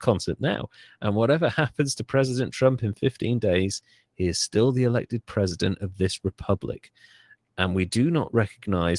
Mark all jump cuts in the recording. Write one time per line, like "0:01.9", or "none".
none

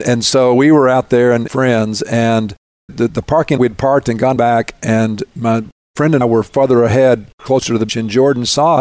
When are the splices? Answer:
0:01.5
0:02.9
0:03.6
0:04.4
0:05.3
0:06.2
0:07.9

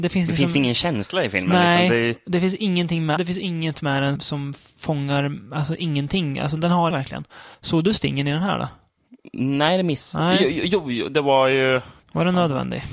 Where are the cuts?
0:03.2
0:04.2
0:06.6
0:06.9
0:07.5
0:12.0

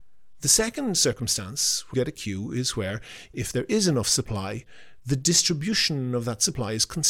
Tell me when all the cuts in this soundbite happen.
0:01.9
0:03.3

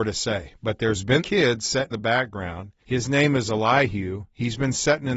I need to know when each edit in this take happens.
0:01.2
0:01.9
0:02.8

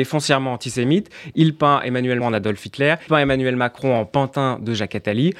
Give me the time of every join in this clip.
0:02.2
0:03.1

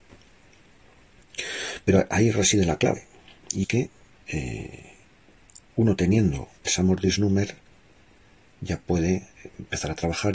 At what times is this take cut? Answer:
0:03.6
0:06.7

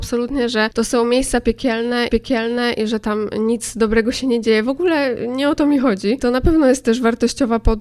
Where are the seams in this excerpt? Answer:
0:02.1

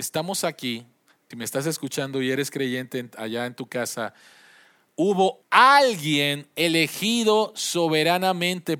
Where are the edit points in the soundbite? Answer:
0:01.3
0:05.4

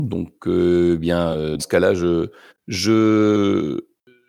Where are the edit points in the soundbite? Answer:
0:01.6
0:02.5

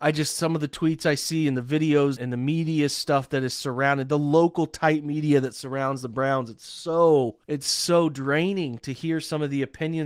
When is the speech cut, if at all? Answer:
0:02.2
0:07.4

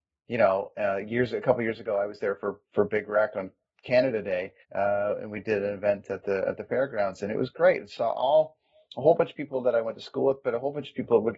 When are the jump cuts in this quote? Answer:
0:04.6

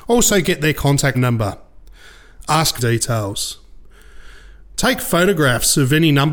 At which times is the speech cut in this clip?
0:01.1
0:02.8

